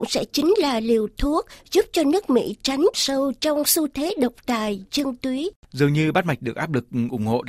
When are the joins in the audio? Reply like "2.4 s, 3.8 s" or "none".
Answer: 2.9 s